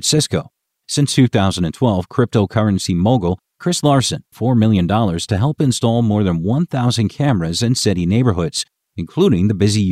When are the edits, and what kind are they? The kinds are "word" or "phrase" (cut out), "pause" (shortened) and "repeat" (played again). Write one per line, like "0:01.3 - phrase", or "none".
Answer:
0:04.3 - phrase